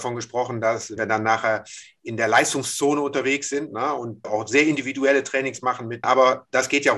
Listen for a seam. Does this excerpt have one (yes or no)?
yes